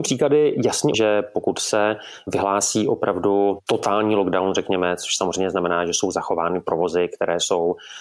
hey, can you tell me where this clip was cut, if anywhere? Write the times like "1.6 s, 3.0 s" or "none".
0.9 s